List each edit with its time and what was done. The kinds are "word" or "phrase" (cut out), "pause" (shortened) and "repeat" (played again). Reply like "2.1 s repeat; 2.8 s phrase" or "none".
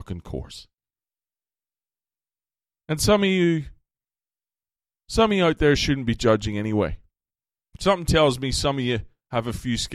none